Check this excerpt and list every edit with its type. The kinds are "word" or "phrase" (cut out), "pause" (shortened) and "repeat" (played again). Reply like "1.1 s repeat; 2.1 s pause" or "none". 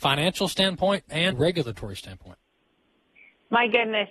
1.3 s word